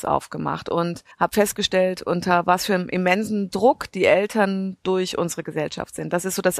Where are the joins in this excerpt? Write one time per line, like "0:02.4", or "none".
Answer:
0:01.1